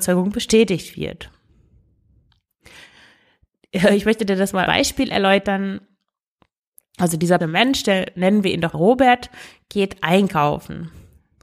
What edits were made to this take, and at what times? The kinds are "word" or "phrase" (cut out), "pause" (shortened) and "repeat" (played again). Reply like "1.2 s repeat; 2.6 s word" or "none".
4.7 s word; 7.4 s word; 8.7 s word